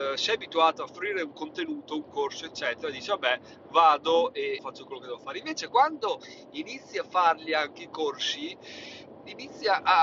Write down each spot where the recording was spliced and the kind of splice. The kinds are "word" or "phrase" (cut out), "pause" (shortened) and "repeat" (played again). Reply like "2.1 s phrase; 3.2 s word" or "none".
4.6 s phrase